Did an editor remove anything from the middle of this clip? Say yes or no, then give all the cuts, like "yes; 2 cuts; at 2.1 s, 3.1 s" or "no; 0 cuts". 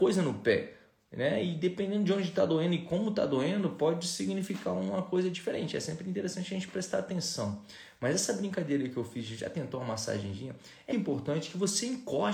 yes; 1 cut; at 10.9 s